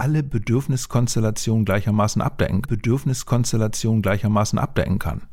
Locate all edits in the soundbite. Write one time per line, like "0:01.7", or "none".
0:02.6